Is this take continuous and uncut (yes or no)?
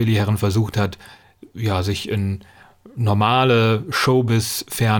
yes